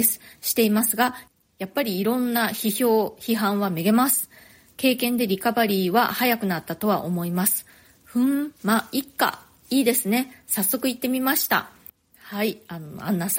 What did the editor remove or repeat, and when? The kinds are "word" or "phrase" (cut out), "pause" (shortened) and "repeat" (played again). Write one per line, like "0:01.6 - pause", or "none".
none